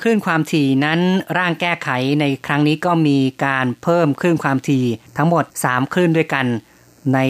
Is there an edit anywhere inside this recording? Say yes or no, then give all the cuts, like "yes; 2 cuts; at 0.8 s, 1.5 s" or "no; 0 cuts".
yes; 2 cuts; at 5.1 s, 5.5 s